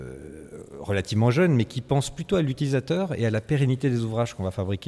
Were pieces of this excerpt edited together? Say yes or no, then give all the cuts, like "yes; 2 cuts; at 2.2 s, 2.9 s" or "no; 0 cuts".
no; 0 cuts